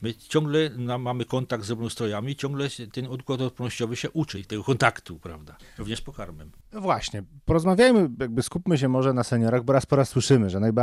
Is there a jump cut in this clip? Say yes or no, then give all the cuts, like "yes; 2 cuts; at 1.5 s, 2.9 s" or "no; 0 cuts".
yes; 1 cut; at 6.6 s